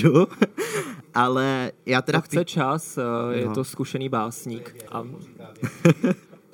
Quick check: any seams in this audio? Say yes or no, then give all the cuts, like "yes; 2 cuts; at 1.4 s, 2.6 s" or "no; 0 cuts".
yes; 1 cut; at 4.9 s